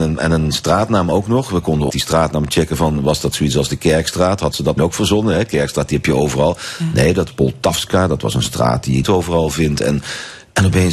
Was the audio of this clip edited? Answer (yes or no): yes